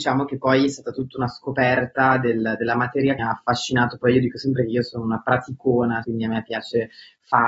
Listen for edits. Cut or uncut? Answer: cut